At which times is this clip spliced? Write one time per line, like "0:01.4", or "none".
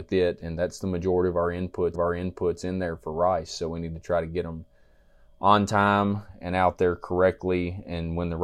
0:01.9